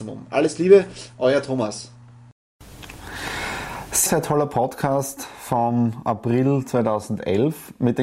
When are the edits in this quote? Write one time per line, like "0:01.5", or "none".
0:04.1